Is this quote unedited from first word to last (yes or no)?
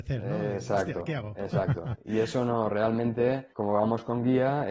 no